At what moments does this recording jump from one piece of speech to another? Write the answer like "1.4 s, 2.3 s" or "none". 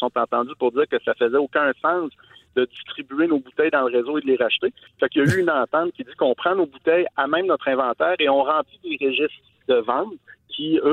9.6 s